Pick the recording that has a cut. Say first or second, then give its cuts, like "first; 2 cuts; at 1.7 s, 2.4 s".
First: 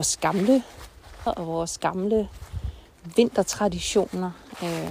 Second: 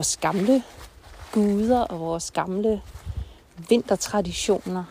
first; 1 cut; at 1.3 s